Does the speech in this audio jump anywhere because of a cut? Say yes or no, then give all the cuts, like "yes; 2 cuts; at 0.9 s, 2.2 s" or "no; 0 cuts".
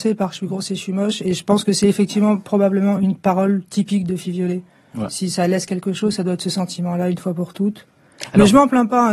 no; 0 cuts